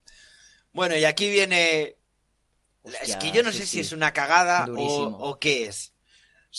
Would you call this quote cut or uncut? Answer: uncut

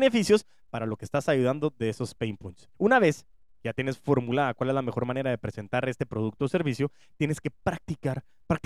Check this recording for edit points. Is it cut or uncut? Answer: cut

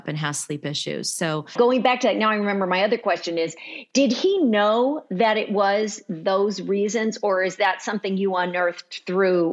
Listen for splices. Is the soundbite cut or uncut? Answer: uncut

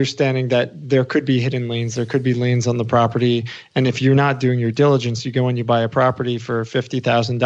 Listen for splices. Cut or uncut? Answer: uncut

